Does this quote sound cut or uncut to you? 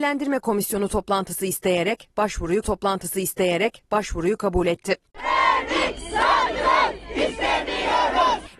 cut